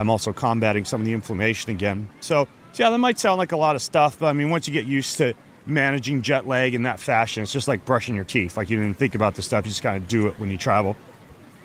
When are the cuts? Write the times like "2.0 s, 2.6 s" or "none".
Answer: none